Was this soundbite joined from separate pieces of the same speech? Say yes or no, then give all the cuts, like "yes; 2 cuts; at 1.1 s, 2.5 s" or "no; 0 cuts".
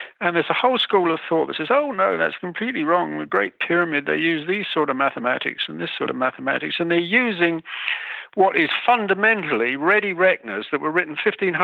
no; 0 cuts